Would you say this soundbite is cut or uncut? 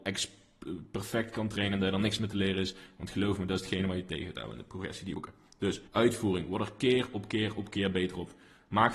cut